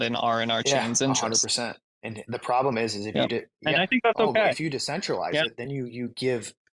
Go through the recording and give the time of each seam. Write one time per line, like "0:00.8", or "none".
none